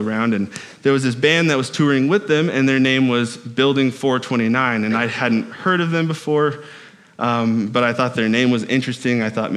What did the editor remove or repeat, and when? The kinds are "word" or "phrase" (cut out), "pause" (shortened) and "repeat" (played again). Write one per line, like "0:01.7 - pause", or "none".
none